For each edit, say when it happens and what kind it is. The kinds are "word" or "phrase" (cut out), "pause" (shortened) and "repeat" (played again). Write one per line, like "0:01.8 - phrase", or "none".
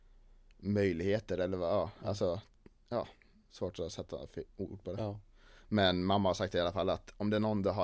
none